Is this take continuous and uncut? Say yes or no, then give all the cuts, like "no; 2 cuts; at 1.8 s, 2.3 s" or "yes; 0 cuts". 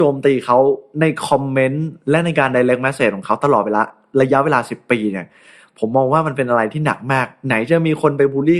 yes; 0 cuts